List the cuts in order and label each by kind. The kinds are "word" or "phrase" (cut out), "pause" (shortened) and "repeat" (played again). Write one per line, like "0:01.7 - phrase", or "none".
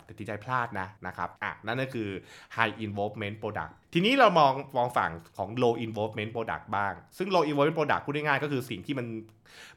0:01.0 - pause
0:01.4 - pause
0:03.8 - pause